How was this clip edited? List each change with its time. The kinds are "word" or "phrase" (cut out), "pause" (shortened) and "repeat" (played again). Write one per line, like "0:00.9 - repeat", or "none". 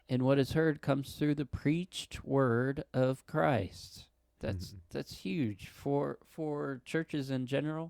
none